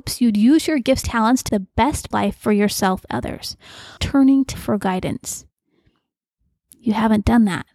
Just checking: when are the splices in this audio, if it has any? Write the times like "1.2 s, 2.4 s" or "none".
1.0 s, 1.5 s, 2.1 s, 3.1 s, 4.0 s, 4.5 s